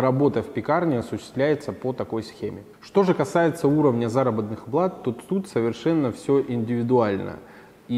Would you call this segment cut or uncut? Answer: uncut